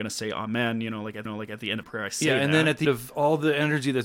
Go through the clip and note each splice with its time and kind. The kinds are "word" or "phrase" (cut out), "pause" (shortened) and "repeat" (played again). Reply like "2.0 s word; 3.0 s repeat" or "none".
1.3 s repeat; 1.8 s word; 2.8 s word